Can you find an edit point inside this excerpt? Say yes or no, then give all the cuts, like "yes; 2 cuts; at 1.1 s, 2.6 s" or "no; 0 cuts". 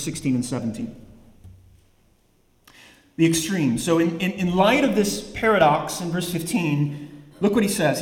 no; 0 cuts